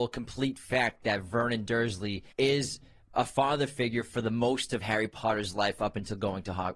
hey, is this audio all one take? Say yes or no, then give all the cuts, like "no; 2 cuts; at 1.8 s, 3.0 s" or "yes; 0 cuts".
no; 1 cut; at 2.3 s